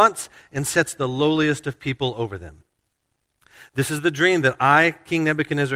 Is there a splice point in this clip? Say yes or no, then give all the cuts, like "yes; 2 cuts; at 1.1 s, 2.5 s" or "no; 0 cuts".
no; 0 cuts